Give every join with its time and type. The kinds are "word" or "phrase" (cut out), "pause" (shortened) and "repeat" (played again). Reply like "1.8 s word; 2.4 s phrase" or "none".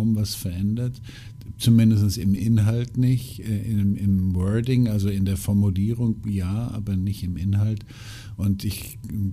none